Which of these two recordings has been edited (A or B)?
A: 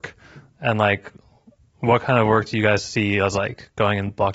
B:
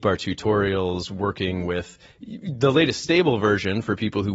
B